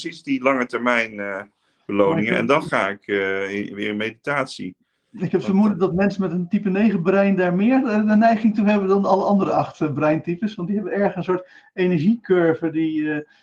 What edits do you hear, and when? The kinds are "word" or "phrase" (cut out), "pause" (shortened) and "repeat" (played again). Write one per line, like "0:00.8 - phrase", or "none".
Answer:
none